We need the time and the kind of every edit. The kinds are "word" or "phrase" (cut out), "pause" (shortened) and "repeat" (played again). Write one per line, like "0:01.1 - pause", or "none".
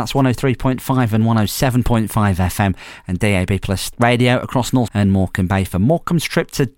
0:03.9 - word
0:04.9 - word